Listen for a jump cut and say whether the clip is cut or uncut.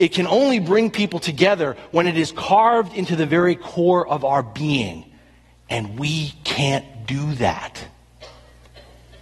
uncut